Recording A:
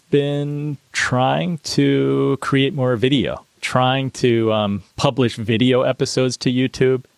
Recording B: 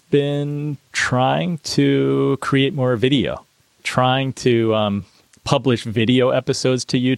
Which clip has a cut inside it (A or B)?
A